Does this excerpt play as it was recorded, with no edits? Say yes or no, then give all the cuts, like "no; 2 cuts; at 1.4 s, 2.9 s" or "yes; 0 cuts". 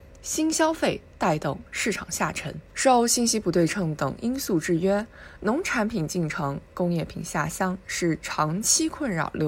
no; 1 cut; at 2.7 s